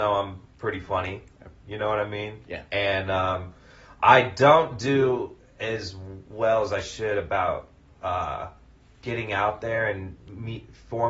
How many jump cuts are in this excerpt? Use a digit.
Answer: 0